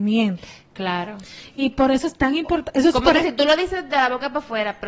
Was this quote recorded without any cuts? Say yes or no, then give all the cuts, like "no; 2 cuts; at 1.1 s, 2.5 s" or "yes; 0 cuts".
yes; 0 cuts